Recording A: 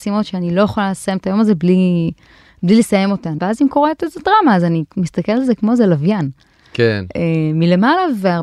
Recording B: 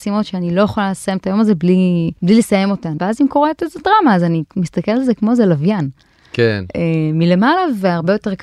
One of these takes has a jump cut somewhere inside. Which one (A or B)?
B